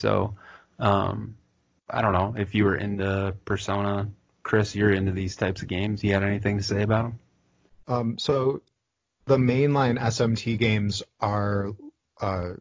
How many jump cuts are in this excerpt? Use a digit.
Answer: 0